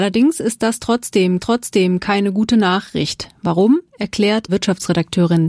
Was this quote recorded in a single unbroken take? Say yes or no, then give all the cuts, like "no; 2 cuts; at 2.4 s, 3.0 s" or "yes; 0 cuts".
no; 2 cuts; at 1.4 s, 4.5 s